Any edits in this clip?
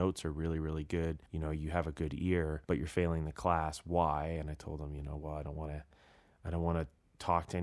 yes; 2 cuts; at 1.3 s, 2.6 s

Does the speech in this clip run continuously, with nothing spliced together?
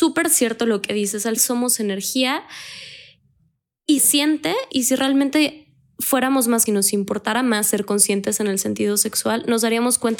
no; 4 cuts; at 1.4 s, 4.0 s, 4.7 s, 6.7 s

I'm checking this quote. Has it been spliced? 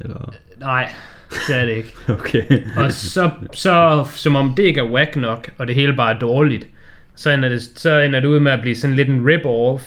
no; 0 cuts

